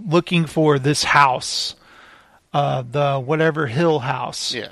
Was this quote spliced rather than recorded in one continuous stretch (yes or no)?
no